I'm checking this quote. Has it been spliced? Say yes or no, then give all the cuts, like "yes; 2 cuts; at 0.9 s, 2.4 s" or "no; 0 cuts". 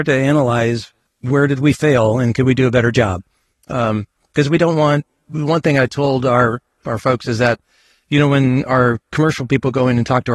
yes; 1 cut; at 1.1 s